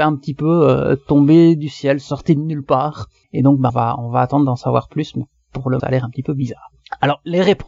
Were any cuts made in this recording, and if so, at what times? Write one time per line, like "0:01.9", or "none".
0:03.2
0:03.7
0:05.8